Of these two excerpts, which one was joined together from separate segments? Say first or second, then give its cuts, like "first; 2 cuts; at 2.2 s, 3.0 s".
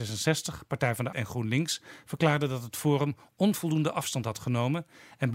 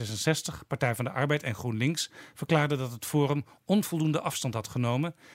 first; 1 cut; at 1.1 s